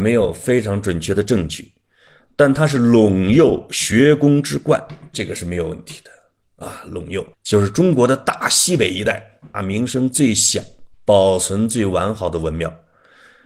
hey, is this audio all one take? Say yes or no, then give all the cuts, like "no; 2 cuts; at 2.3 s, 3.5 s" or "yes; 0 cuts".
no; 3 cuts; at 7.3 s, 9.5 s, 10.9 s